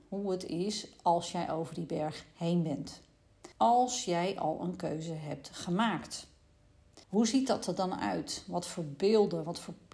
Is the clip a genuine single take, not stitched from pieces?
no; 2 cuts; at 3.5 s, 7.0 s

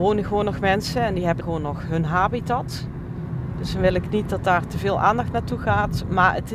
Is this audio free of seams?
no; 1 cut; at 1.4 s

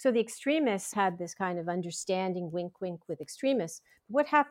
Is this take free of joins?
no; 1 cut; at 0.9 s

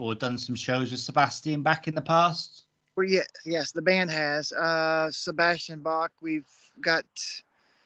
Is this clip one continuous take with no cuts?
yes; 0 cuts

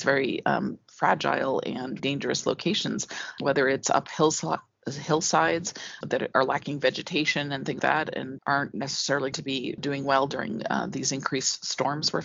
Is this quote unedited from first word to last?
no; 8 cuts; at 2.0 s, 3.4 s, 6.0 s, 6.3 s, 7.8 s, 8.4 s, 9.3 s, 9.8 s

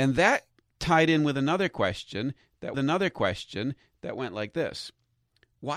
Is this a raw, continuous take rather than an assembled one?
no; 1 cut; at 2.7 s

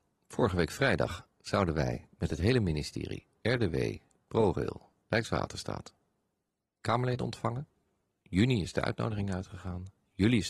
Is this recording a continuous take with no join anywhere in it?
yes; 0 cuts

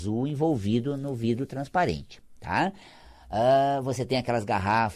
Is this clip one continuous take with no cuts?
yes; 0 cuts

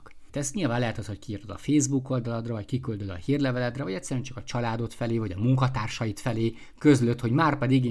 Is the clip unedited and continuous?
yes; 0 cuts

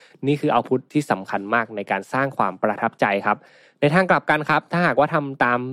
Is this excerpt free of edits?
yes; 0 cuts

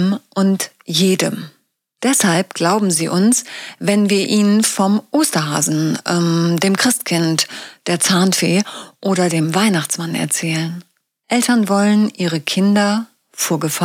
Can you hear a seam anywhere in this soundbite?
no; 0 cuts

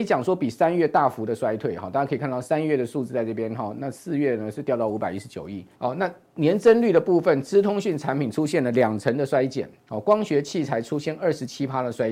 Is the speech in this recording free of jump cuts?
no; 1 cut; at 5.8 s

